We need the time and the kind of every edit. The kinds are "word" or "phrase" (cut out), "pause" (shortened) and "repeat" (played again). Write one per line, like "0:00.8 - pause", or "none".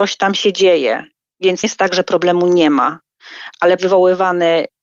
0:01.6 - word
0:03.8 - phrase